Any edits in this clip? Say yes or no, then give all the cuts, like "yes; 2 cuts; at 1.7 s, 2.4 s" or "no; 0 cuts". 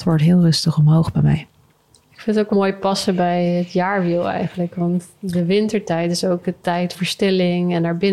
yes; 2 cuts; at 2.5 s, 6.9 s